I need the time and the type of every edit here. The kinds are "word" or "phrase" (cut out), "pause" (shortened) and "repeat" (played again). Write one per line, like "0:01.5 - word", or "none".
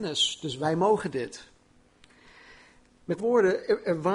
0:03.2 - word